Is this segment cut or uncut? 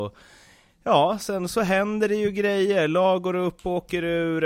uncut